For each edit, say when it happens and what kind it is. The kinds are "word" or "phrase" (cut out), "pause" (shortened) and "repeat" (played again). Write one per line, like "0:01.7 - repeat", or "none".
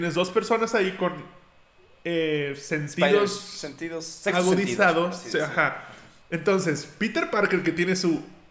none